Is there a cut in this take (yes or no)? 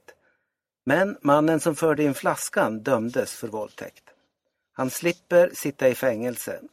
no